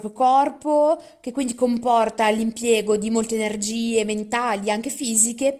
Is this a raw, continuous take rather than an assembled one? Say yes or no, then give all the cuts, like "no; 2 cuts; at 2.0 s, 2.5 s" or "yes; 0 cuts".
yes; 0 cuts